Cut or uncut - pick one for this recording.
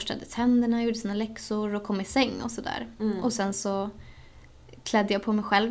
uncut